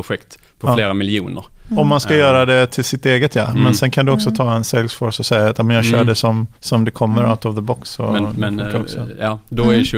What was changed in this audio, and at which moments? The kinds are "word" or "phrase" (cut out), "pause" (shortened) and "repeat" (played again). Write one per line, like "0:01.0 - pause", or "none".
0:06.6 - pause